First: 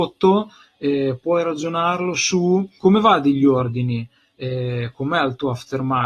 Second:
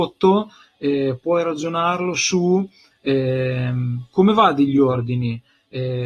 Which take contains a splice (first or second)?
first